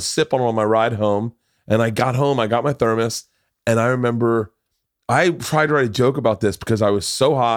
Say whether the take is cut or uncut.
uncut